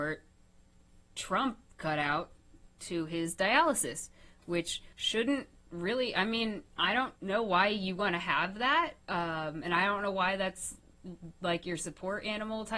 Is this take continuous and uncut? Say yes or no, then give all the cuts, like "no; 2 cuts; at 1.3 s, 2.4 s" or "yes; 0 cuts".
no; 4 cuts; at 4.9 s, 6.7 s, 7.2 s, 9.0 s